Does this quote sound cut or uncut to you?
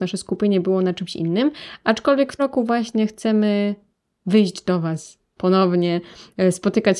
cut